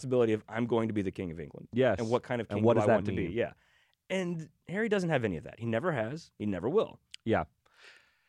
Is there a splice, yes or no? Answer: no